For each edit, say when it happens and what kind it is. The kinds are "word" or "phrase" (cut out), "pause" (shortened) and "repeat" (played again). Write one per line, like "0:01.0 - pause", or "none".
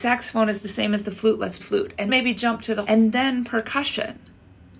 0:01.6 - word
0:02.1 - word
0:02.8 - word